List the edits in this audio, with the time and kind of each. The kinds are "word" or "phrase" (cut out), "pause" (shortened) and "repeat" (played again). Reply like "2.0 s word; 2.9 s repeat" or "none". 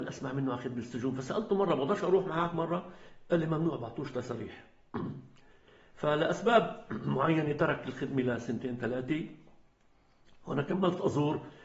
none